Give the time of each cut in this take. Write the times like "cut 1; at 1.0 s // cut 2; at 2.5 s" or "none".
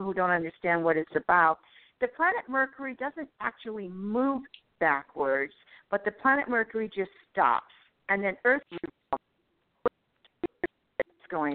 cut 1; at 8.7 s